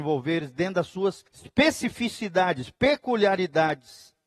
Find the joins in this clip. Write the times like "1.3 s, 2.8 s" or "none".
1.3 s